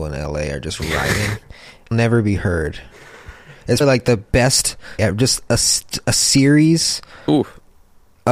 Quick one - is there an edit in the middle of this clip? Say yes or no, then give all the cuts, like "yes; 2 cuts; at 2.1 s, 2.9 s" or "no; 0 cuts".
yes; 4 cuts; at 1.9 s, 3.8 s, 5.0 s, 7.2 s